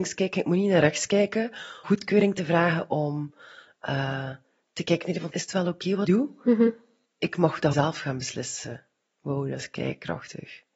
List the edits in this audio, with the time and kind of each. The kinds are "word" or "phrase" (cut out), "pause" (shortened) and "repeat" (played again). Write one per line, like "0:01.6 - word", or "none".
0:01.8 - word
0:05.3 - word
0:06.0 - word
0:07.7 - word